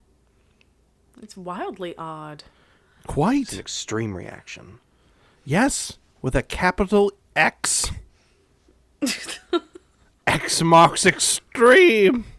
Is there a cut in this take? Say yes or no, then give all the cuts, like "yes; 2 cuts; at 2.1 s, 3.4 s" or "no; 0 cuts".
no; 0 cuts